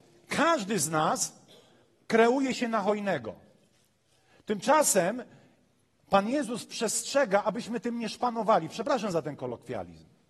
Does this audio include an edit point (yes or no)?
no